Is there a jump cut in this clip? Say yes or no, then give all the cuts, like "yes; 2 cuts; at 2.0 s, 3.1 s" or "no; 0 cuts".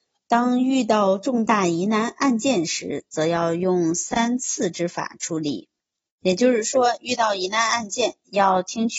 no; 0 cuts